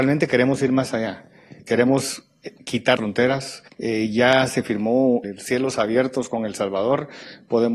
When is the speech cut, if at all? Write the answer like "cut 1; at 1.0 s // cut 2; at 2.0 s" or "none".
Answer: cut 1; at 1.6 s // cut 2; at 3.0 s // cut 3; at 3.7 s // cut 4; at 5.2 s